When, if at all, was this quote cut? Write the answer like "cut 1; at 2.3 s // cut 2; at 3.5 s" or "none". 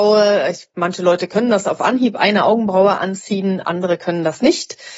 none